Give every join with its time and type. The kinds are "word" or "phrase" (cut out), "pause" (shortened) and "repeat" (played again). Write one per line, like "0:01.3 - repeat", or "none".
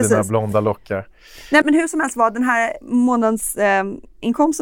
0:01.6 - word